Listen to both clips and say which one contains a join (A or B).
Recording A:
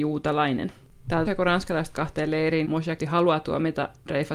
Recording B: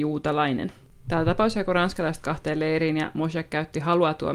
A